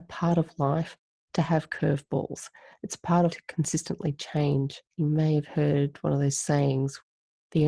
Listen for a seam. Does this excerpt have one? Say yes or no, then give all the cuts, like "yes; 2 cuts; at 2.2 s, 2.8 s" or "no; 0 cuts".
yes; 2 cuts; at 3.3 s, 4.9 s